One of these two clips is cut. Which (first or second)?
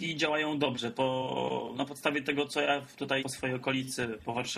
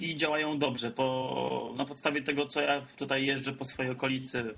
first